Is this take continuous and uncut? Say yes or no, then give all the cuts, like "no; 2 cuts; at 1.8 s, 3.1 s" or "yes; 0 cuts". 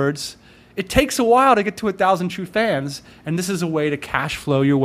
yes; 0 cuts